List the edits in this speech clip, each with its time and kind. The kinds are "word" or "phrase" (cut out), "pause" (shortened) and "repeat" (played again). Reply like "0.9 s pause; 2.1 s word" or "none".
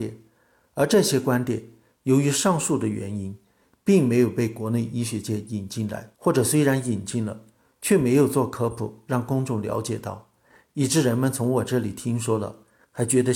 6.1 s pause